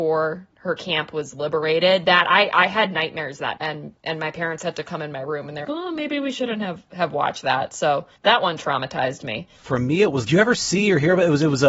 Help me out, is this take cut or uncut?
cut